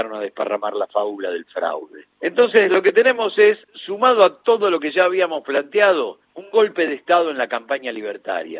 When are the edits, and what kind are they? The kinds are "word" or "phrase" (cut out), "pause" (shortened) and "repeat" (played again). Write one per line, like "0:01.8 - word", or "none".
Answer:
0:02.1 - pause
0:03.6 - pause
0:06.2 - pause